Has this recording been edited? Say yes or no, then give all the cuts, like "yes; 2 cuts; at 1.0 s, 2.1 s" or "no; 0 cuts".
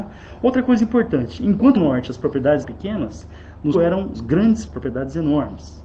yes; 5 cuts; at 1.8 s, 2.6 s, 3.7 s, 4.1 s, 4.7 s